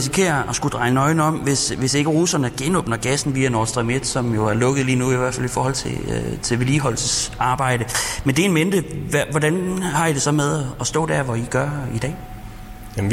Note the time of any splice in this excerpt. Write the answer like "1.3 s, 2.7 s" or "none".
none